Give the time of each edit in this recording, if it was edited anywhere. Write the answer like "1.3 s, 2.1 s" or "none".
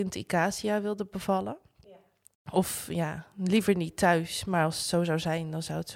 none